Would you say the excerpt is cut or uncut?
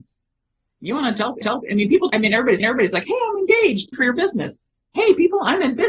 cut